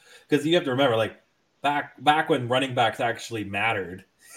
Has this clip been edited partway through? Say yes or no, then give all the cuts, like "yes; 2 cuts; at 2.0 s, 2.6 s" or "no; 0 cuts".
no; 0 cuts